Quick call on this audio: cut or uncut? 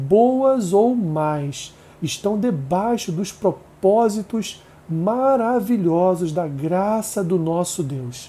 uncut